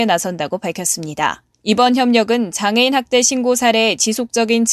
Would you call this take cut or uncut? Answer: cut